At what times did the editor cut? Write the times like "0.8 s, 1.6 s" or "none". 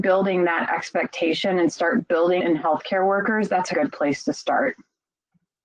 2.4 s, 3.7 s